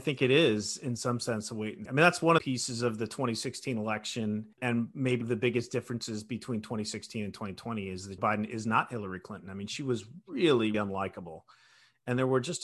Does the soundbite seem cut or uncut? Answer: cut